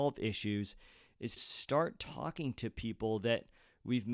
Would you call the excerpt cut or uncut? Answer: cut